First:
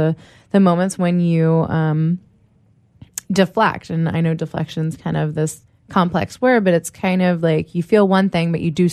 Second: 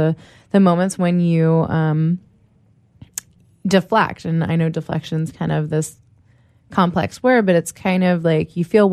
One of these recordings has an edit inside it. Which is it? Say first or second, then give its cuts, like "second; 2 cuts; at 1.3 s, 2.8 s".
first; 2 cuts; at 3.2 s, 5.7 s